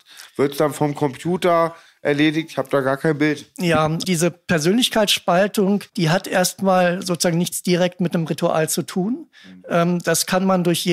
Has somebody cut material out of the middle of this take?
yes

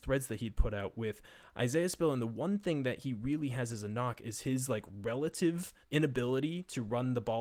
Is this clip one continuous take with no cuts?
no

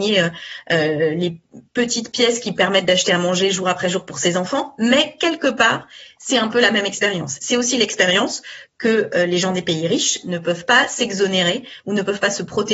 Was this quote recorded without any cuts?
yes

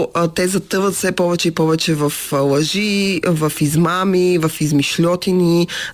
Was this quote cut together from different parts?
no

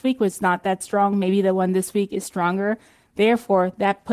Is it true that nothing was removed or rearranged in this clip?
yes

